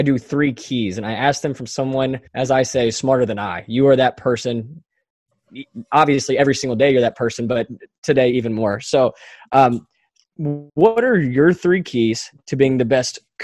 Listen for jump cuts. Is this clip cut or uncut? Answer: cut